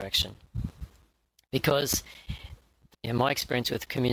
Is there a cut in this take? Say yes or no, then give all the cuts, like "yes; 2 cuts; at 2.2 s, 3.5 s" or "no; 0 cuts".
yes; 1 cut; at 2.9 s